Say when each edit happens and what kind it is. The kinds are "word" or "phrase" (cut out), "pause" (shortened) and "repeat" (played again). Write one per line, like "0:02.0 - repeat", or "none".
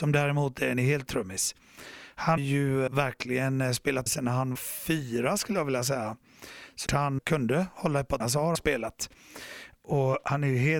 0:01.1 - word
0:02.4 - word
0:02.9 - word
0:04.1 - word
0:04.6 - word
0:06.9 - word
0:07.2 - word
0:08.2 - word
0:08.6 - word